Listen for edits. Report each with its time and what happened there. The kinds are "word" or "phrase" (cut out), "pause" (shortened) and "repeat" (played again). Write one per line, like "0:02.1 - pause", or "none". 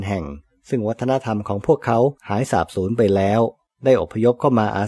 0:02.2 - pause
0:03.7 - pause